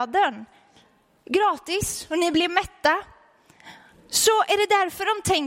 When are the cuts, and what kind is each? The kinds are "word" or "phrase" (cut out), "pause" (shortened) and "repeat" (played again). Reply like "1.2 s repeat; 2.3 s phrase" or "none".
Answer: none